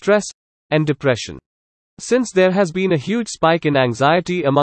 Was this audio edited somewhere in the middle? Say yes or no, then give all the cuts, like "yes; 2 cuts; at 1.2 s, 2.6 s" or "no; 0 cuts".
no; 0 cuts